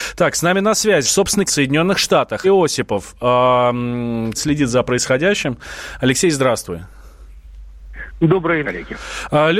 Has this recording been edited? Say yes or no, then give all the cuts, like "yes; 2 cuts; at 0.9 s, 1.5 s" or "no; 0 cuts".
yes; 5 cuts; at 1.0 s, 1.5 s, 2.4 s, 4.3 s, 8.6 s